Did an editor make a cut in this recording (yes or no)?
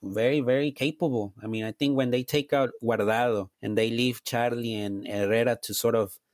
yes